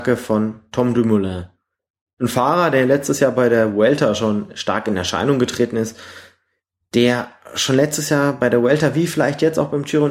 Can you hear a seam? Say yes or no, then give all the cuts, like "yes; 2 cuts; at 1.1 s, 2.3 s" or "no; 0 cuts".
no; 0 cuts